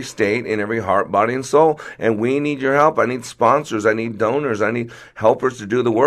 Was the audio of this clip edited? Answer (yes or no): no